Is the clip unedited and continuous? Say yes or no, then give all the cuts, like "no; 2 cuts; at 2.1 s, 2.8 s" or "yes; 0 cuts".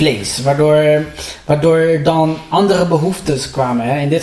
yes; 0 cuts